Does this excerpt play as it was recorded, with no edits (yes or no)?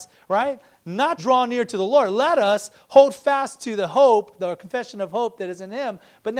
no